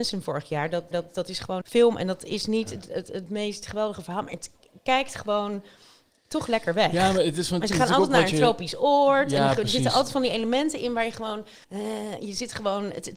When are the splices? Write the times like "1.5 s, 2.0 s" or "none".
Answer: 0.9 s, 1.6 s, 11.6 s